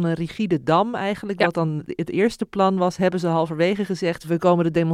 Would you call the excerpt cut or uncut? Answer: uncut